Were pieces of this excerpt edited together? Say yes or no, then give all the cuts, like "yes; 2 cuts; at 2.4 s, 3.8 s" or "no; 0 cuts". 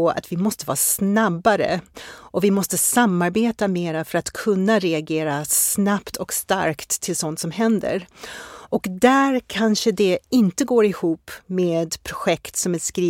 no; 0 cuts